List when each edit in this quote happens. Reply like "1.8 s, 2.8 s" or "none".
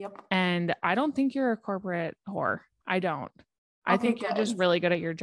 none